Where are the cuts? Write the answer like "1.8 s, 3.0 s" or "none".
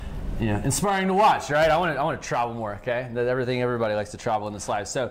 none